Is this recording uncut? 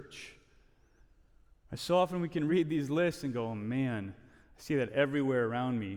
yes; 0 cuts

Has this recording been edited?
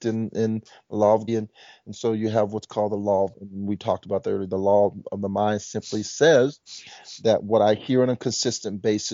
yes; 2 cuts; at 1.3 s, 3.3 s

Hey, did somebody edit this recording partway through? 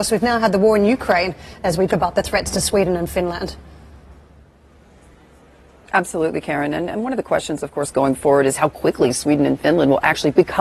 yes; 1 cut; at 1.9 s

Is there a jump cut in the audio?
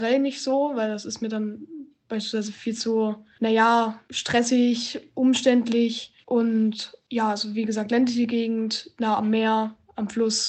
no; 0 cuts

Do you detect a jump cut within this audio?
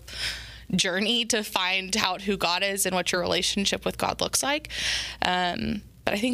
no; 0 cuts

